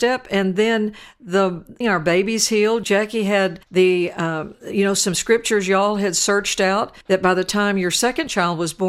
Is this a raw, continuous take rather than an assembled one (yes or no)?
no